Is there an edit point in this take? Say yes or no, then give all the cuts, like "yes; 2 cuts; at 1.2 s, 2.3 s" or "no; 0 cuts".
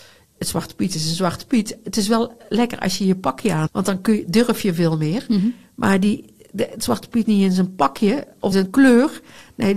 yes; 3 cuts; at 3.7 s, 7.2 s, 8.5 s